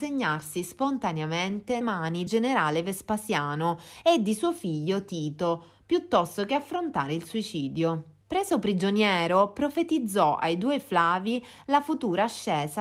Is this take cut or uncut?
cut